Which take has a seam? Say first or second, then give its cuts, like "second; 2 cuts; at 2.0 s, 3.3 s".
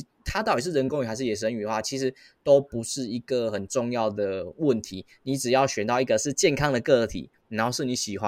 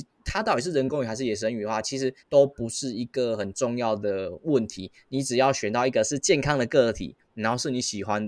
second; 1 cut; at 2.2 s